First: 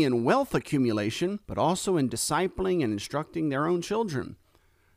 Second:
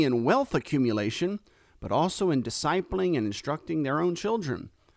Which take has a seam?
first; 1 cut; at 1.4 s

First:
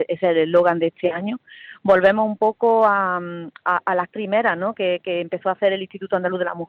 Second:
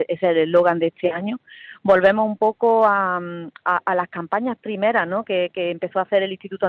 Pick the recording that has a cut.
first; 1 cut; at 4.1 s

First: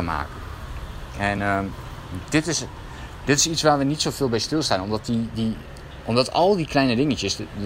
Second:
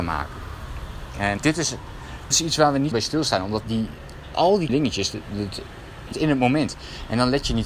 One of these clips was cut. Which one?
second; 7 cuts; at 1.4 s, 2.3 s, 2.9 s, 3.6 s, 4.3 s, 4.7 s, 6.1 s

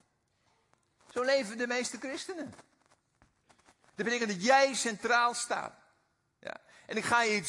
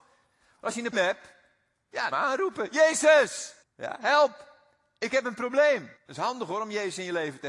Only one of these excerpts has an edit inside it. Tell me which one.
second; 4 cuts; at 0.9 s, 2.1 s, 3.6 s, 6.0 s

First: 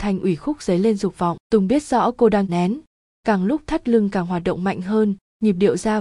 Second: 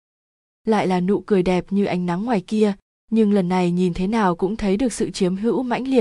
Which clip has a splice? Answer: first; 2 cuts; at 1.4 s, 2.5 s

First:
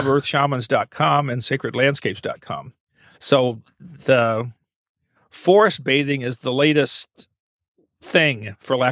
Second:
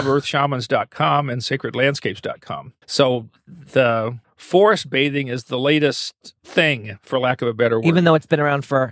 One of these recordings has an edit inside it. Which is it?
second; 3 cuts; at 2.8 s, 4.2 s, 6.4 s

